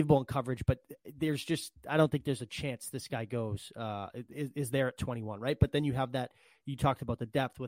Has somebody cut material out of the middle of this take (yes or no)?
no